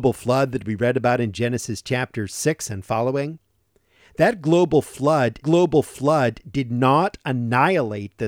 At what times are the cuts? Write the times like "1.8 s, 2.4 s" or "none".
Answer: 5.4 s